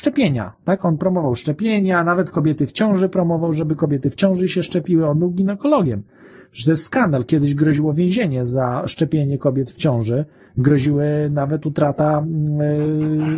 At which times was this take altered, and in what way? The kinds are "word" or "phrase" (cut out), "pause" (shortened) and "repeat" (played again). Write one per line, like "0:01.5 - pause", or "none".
none